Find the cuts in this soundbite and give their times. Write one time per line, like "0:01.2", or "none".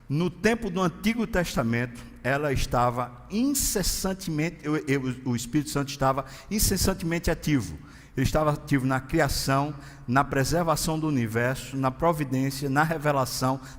none